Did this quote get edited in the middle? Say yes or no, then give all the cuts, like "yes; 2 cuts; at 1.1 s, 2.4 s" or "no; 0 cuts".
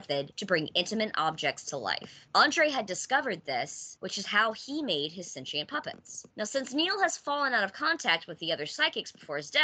no; 0 cuts